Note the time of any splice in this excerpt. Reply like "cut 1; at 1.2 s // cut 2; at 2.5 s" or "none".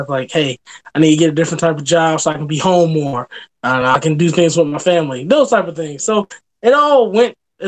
none